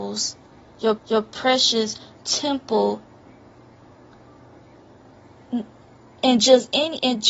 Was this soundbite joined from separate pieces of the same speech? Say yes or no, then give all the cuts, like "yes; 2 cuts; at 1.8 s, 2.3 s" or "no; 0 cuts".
yes; 1 cut; at 1.0 s